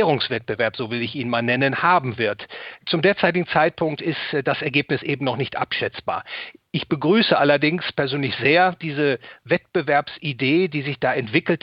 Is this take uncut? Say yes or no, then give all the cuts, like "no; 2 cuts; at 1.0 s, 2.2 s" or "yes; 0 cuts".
yes; 0 cuts